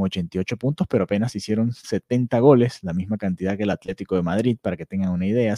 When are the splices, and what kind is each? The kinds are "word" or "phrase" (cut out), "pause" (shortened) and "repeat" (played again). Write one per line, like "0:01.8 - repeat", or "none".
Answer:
none